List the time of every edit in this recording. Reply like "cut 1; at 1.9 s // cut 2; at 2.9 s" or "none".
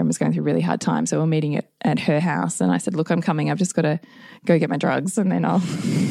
none